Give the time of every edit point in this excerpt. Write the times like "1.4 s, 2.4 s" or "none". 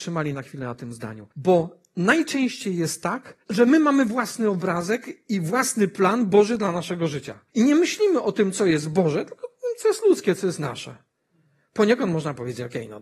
1.3 s, 3.4 s, 7.5 s